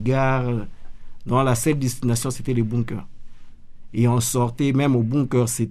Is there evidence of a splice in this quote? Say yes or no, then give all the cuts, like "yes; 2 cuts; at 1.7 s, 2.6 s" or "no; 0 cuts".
no; 0 cuts